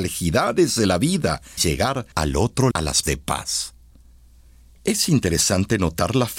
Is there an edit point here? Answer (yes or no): yes